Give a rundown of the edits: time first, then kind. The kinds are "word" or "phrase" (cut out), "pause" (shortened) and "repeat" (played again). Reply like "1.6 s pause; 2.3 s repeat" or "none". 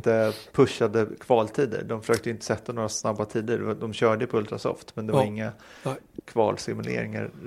none